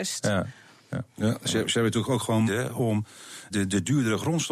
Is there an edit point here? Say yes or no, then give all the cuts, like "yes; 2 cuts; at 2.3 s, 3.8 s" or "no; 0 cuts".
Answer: yes; 2 cuts; at 2.5 s, 3.5 s